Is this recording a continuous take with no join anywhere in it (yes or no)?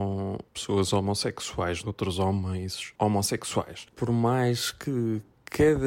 no